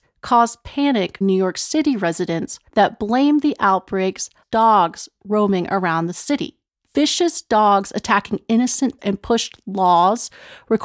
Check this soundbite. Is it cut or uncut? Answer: cut